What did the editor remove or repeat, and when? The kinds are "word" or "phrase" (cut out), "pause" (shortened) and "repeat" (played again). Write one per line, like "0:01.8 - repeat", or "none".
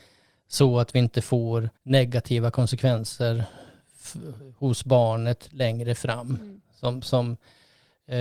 0:01.8 - pause